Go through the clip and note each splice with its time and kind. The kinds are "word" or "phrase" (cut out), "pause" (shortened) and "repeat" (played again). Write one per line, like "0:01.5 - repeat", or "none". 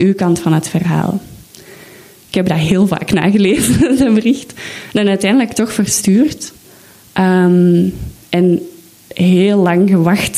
none